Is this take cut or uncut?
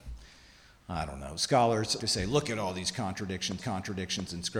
cut